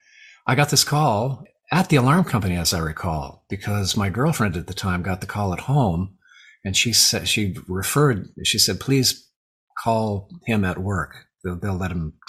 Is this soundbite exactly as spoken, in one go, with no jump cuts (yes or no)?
yes